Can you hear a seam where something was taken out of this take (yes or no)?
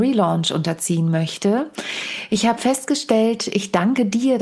no